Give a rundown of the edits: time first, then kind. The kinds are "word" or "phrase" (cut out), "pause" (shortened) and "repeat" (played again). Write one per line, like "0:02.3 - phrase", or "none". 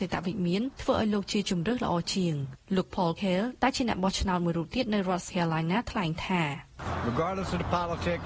0:03.2 - word
0:05.3 - word